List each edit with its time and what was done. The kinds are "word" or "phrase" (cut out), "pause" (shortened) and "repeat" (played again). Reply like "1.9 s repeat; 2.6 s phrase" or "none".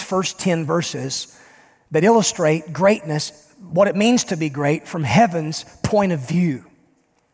none